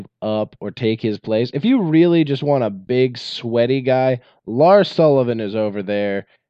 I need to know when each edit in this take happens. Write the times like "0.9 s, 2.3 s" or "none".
none